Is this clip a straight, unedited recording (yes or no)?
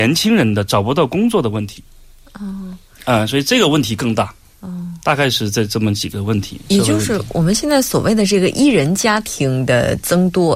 yes